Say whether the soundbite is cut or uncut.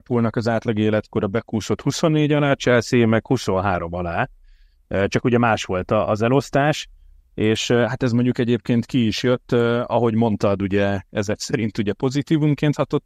uncut